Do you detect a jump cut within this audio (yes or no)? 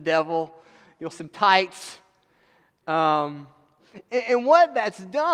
yes